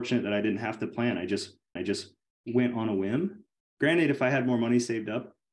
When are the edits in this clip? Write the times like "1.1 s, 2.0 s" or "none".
1.8 s